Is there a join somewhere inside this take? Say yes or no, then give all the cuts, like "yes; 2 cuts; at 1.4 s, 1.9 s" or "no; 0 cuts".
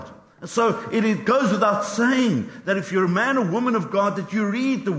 no; 0 cuts